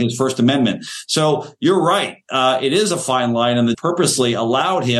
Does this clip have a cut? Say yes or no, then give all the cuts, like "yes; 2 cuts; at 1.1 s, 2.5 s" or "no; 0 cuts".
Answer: yes; 1 cut; at 3.7 s